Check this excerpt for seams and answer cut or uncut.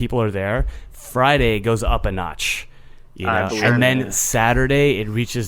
cut